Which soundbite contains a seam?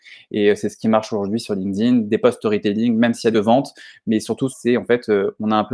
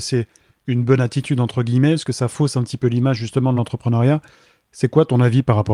first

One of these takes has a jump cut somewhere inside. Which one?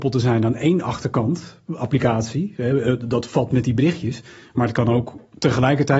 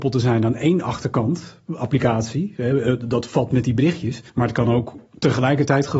second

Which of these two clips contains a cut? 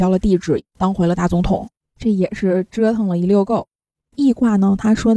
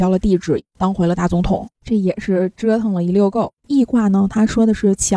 second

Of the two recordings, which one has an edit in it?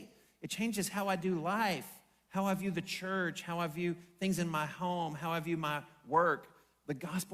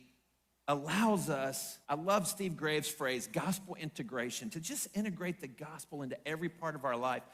second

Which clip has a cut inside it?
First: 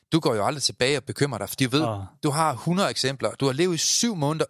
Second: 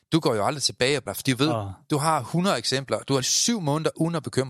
second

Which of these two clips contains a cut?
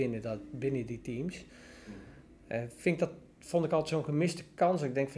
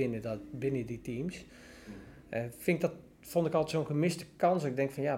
second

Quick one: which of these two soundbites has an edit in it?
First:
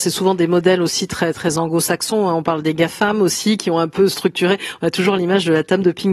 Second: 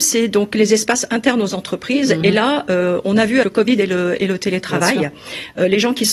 second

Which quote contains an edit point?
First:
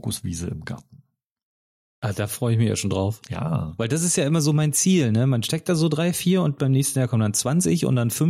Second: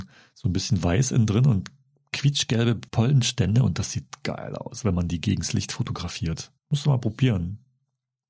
second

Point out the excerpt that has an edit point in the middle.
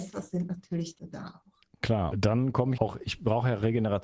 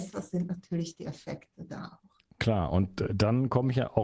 first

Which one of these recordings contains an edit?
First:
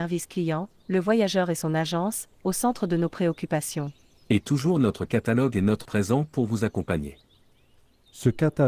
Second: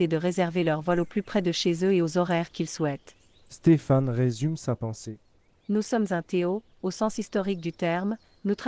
first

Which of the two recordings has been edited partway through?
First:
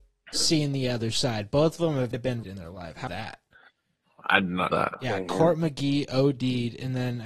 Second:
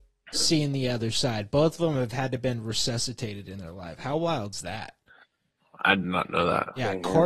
first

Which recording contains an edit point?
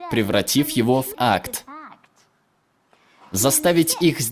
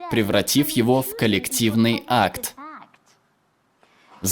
first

